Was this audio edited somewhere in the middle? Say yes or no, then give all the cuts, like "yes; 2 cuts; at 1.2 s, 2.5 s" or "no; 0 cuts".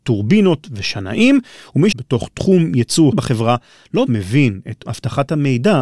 yes; 4 cuts; at 1.9 s, 3.1 s, 4.1 s, 4.9 s